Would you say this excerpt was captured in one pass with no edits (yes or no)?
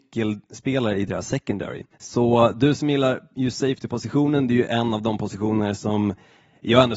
no